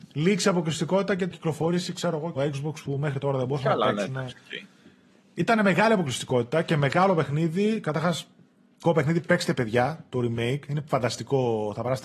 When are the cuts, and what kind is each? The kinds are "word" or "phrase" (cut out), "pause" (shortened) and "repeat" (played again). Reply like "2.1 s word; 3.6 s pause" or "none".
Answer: 1.3 s word; 2.4 s word; 8.8 s word